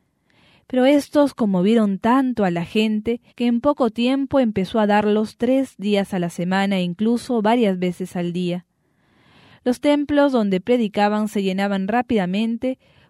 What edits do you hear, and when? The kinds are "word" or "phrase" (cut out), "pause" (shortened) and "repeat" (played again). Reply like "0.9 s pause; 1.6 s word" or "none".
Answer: 3.3 s pause